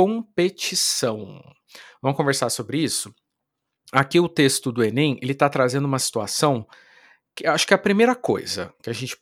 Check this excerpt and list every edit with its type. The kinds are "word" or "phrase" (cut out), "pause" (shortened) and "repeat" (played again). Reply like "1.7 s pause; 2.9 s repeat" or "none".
none